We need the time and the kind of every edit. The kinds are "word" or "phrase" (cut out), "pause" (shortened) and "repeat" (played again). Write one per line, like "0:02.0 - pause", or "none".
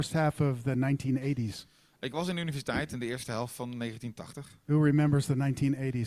none